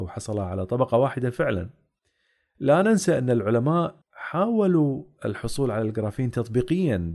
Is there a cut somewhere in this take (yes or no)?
yes